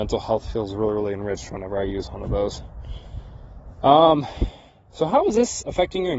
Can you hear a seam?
no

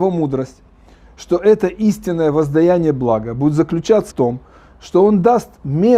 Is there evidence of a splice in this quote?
yes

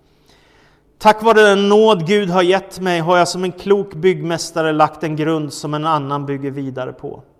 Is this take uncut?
yes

